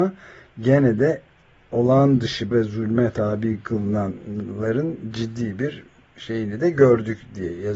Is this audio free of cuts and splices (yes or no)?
no